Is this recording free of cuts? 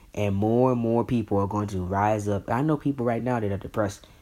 yes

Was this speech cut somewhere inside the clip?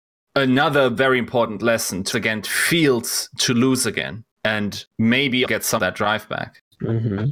yes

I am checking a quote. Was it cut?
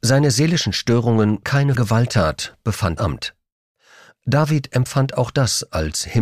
yes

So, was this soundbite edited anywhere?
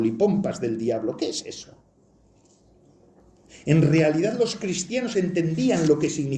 no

